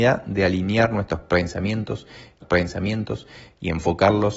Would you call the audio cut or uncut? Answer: cut